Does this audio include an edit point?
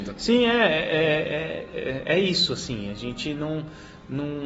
no; 0 cuts

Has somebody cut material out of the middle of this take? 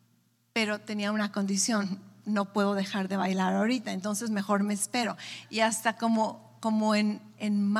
no; 0 cuts

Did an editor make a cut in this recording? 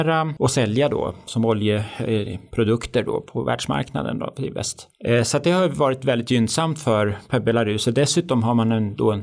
no; 0 cuts

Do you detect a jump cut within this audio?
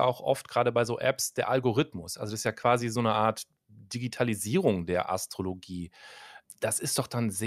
no; 0 cuts

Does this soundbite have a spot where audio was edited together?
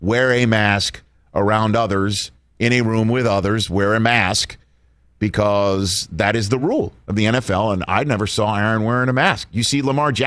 no; 0 cuts

